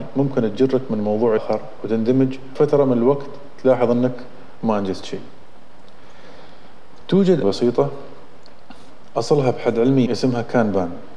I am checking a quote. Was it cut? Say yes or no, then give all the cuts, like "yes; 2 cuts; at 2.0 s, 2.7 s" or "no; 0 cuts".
yes; 4 cuts; at 1.4 s, 2.6 s, 7.4 s, 10.1 s